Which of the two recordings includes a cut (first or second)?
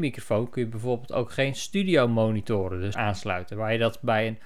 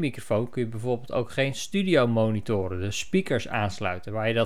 first